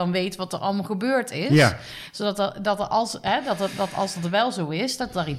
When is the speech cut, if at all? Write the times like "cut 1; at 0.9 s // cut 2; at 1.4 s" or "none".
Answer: none

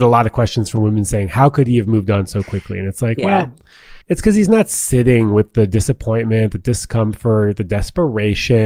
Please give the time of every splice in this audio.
cut 1; at 4.0 s

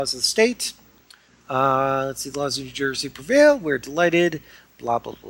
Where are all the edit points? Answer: none

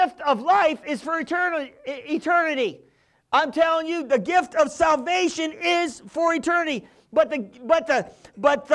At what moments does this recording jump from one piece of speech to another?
none

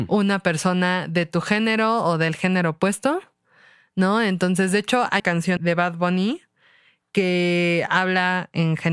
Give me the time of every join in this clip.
cut 1; at 5.2 s // cut 2; at 5.6 s

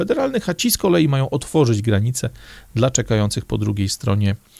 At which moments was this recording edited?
none

